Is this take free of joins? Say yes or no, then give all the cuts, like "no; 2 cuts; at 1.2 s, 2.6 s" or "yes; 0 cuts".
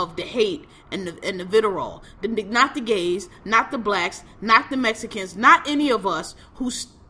yes; 0 cuts